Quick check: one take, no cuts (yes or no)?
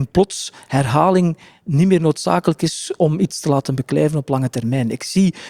yes